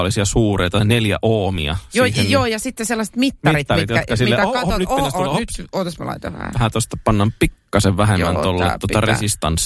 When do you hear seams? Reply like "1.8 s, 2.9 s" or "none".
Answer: none